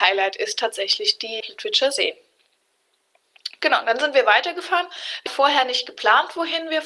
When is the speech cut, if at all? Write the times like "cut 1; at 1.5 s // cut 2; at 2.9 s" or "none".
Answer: cut 1; at 1.4 s // cut 2; at 5.3 s